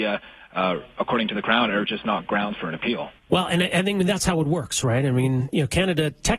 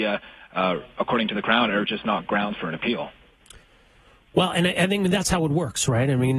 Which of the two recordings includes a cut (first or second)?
first